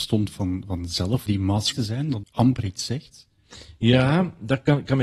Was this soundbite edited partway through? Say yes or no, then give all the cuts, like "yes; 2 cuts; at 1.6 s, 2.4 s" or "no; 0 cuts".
yes; 3 cuts; at 1.3 s, 1.7 s, 2.2 s